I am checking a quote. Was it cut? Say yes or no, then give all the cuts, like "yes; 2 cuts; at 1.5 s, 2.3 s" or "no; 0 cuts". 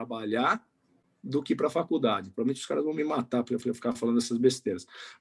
yes; 1 cut; at 3.6 s